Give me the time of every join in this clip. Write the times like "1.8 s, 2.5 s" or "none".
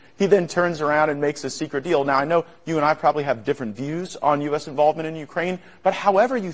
none

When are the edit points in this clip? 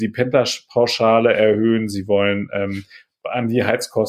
none

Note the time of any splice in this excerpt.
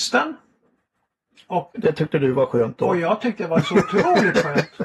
1.7 s

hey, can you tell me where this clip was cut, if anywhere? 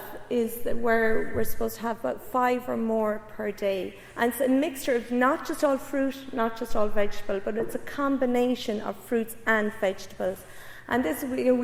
none

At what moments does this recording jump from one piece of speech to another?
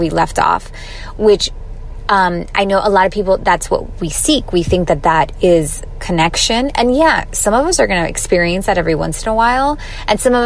none

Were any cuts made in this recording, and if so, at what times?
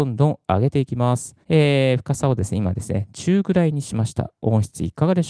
1.4 s

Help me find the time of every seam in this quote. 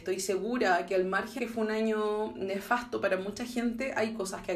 1.4 s

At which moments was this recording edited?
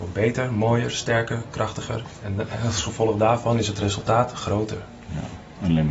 none

